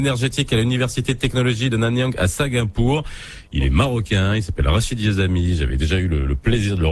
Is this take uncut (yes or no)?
yes